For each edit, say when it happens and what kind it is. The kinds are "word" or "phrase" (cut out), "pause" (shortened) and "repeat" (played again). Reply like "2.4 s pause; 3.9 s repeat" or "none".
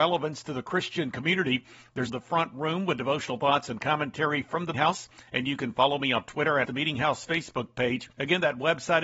2.1 s word; 4.7 s word; 5.3 s pause; 6.6 s word; 8.1 s pause